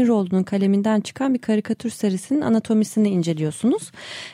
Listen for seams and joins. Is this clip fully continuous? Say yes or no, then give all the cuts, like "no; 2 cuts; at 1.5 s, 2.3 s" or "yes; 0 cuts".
yes; 0 cuts